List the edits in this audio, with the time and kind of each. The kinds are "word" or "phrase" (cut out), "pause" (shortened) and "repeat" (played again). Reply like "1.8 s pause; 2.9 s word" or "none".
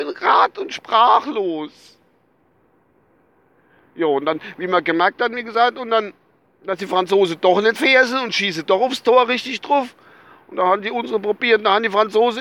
7.8 s word